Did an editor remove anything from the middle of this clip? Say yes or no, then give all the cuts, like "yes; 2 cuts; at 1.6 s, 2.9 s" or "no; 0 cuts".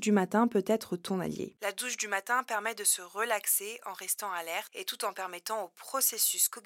no; 0 cuts